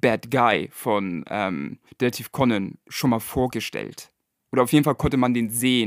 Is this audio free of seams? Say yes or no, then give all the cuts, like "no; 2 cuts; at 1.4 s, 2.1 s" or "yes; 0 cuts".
no; 1 cut; at 1.9 s